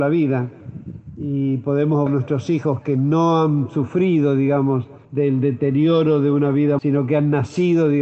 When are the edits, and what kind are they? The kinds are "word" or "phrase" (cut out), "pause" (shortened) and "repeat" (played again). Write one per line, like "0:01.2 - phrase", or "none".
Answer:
0:02.1 - word
0:05.0 - pause
0:06.8 - word